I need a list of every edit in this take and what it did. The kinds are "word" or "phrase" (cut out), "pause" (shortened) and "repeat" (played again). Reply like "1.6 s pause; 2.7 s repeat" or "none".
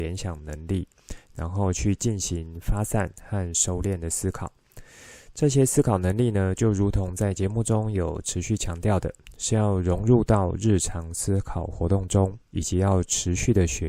12.5 s pause